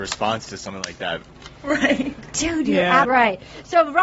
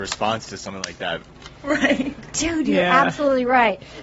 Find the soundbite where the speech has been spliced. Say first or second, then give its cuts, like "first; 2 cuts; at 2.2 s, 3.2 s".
first; 1 cut; at 3.0 s